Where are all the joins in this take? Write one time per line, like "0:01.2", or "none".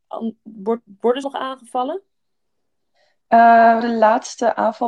0:01.2
0:03.8